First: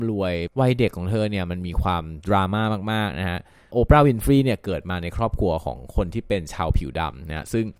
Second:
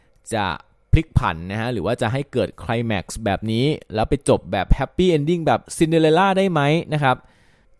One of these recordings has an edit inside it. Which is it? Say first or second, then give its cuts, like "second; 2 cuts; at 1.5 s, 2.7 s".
second; 1 cut; at 5.7 s